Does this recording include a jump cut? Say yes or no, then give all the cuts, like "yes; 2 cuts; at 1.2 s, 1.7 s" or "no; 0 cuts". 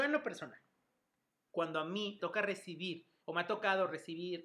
yes; 2 cuts; at 2.2 s, 3.2 s